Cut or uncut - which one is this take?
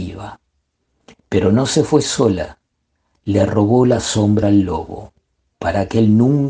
uncut